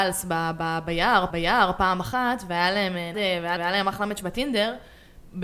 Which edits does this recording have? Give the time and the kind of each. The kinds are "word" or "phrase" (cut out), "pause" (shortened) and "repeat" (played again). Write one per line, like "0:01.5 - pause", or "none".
0:01.3 - repeat
0:03.1 - word
0:03.6 - repeat